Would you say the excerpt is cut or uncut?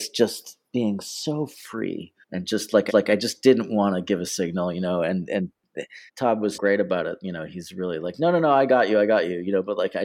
cut